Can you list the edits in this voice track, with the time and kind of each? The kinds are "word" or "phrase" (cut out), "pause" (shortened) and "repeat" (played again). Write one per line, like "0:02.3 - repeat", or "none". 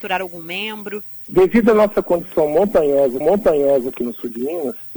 0:03.2 - repeat